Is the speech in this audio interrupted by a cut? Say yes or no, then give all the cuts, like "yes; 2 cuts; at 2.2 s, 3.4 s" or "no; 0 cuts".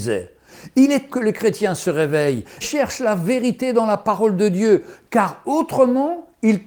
yes; 2 cuts; at 1.1 s, 2.6 s